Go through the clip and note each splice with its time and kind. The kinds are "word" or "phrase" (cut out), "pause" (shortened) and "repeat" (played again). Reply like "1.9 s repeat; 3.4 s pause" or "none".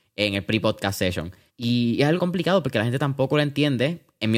1.5 s pause; 2.2 s word